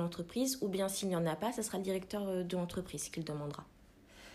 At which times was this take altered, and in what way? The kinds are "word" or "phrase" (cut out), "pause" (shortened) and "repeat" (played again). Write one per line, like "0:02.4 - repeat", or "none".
none